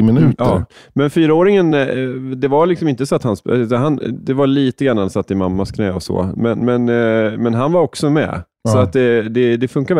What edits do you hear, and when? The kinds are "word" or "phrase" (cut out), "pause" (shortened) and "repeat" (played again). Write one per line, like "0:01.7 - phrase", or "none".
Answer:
none